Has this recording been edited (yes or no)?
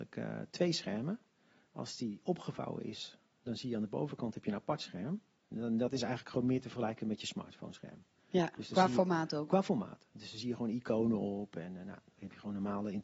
no